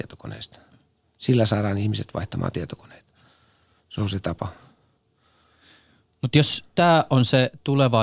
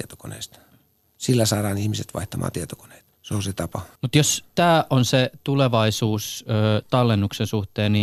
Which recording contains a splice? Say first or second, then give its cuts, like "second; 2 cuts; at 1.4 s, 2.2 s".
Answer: second; 2 cuts; at 3.1 s, 4.0 s